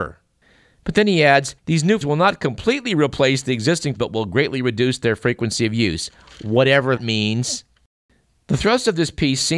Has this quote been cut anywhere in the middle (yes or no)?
yes